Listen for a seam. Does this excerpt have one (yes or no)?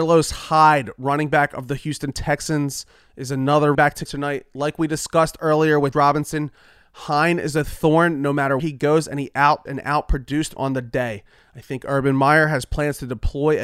yes